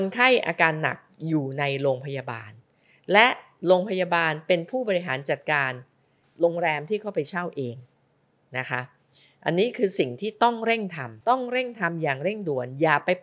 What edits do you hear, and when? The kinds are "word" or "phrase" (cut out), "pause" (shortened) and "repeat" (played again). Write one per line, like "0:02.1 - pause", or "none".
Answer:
0:11.2 - pause